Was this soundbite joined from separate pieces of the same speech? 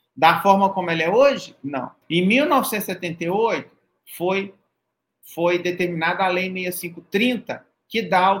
yes; 1 cut; at 2.0 s

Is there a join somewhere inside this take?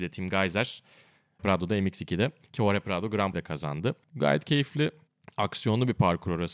yes; 3 cuts; at 1.4 s, 3.3 s, 4.0 s

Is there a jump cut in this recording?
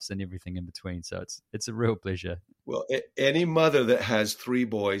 no; 0 cuts

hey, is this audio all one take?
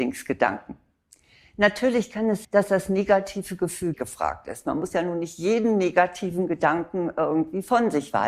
no; 2 cuts; at 2.4 s, 3.9 s

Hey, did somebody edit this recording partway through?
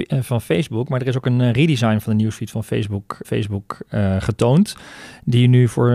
yes; 1 cut; at 3.2 s

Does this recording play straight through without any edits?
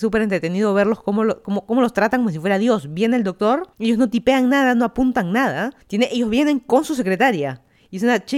no; 2 cuts; at 3.7 s, 5.8 s

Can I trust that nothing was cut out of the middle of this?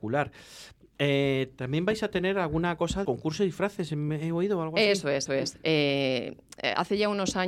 no; 2 cuts; at 3.0 s, 5.3 s

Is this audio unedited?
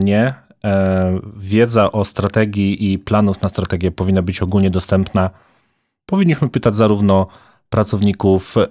yes; 0 cuts

